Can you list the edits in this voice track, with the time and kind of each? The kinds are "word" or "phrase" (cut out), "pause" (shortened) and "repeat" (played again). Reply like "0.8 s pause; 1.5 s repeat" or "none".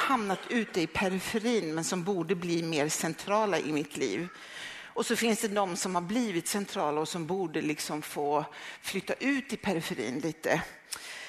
none